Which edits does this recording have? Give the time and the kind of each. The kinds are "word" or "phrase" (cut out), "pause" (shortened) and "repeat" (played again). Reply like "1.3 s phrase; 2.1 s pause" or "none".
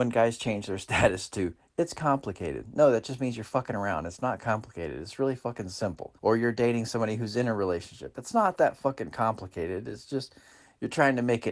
6.2 s pause